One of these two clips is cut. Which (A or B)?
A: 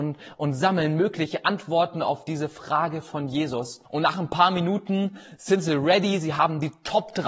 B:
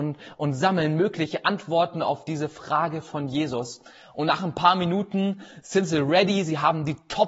A